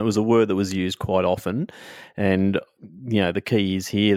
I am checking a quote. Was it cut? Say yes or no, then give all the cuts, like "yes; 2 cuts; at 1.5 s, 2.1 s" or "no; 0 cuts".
no; 0 cuts